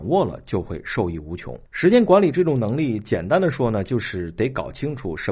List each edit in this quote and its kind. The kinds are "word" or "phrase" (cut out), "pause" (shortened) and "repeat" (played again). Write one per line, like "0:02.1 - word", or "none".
0:01.7 - pause